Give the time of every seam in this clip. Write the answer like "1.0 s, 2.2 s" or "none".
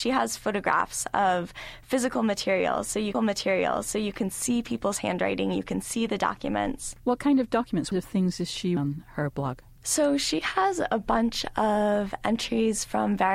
3.1 s, 7.9 s, 8.8 s, 9.8 s

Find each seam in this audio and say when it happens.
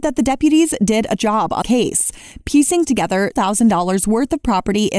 1.2 s, 1.6 s, 2.9 s, 3.3 s

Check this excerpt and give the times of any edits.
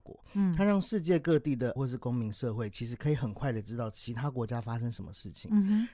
1.8 s

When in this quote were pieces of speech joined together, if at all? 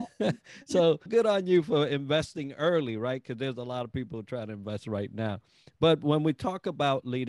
1.1 s

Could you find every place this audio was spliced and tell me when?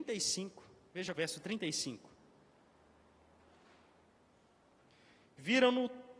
1.1 s

